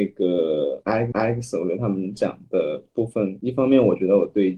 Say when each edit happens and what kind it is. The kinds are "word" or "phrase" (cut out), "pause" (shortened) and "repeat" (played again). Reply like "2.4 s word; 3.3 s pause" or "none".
1.1 s repeat